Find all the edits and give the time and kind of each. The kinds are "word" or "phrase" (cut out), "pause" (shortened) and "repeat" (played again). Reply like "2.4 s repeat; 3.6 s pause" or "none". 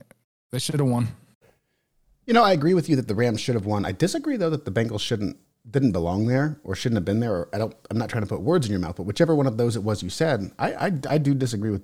none